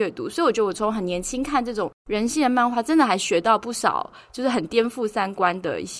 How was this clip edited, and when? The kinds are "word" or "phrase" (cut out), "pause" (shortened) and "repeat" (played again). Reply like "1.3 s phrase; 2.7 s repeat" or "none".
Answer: 2.0 s pause